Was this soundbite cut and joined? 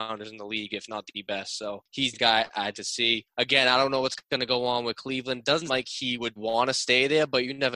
yes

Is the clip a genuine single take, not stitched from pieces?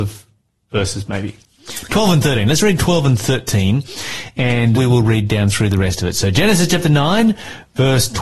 no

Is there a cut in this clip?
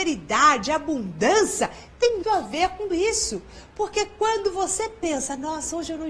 yes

